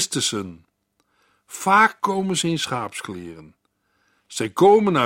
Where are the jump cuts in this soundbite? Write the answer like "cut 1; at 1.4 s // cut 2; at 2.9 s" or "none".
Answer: none

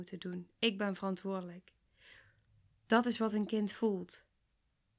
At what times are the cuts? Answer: none

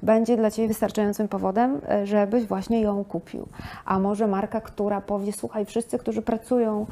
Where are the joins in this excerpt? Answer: none

